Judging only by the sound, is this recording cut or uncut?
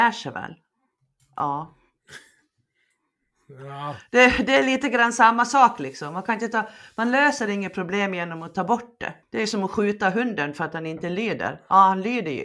cut